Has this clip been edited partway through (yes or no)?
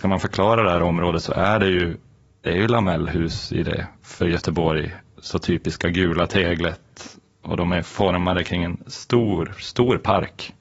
no